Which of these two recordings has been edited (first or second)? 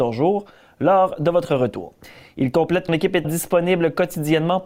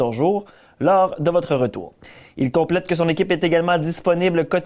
first